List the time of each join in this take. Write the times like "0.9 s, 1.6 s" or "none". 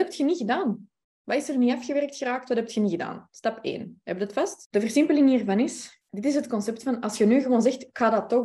none